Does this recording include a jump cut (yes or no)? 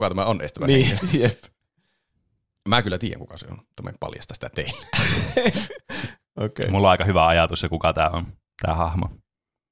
no